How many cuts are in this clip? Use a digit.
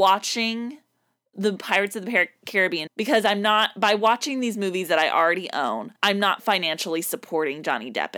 2